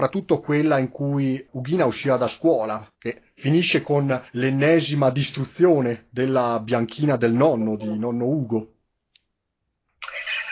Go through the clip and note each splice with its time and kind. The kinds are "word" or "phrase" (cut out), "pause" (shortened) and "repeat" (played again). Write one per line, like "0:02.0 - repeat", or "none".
0:02.9 - pause
0:04.3 - pause